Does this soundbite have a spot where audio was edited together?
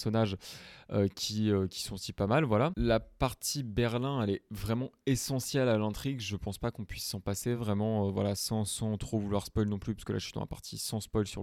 no; 0 cuts

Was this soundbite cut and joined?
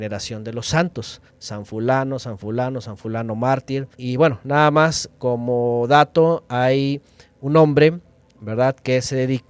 yes; 2 cuts; at 1.3 s, 3.9 s

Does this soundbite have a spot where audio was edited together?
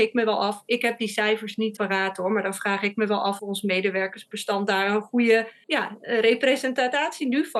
yes; 2 cuts; at 1.8 s, 3.4 s

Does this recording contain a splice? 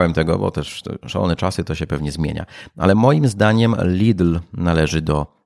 no; 0 cuts

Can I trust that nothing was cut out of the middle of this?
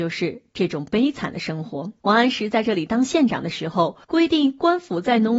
no; 2 cuts; at 2.0 s, 4.0 s

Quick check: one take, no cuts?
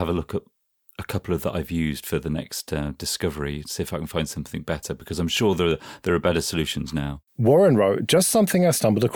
no; 1 cut; at 7.3 s

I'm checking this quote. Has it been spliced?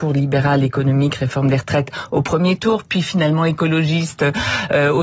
no; 0 cuts

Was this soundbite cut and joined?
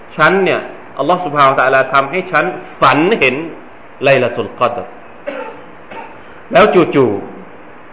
yes; 1 cut; at 3.8 s

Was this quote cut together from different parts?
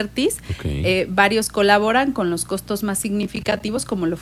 no; 0 cuts

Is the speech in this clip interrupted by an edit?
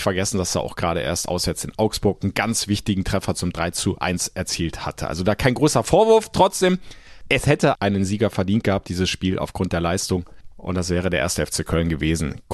yes; 1 cut; at 7.7 s

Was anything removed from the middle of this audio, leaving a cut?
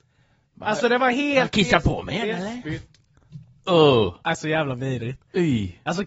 no; 0 cuts

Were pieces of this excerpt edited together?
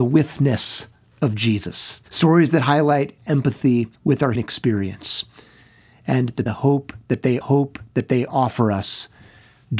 yes; 6 cuts; at 2.1 s, 3.2 s, 3.9 s, 4.4 s, 6.5 s, 7.4 s

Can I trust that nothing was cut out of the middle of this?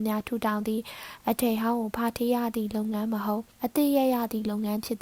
no; 1 cut; at 3.5 s

